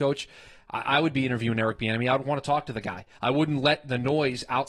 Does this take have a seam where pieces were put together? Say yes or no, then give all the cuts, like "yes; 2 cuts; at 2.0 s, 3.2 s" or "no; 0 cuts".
no; 0 cuts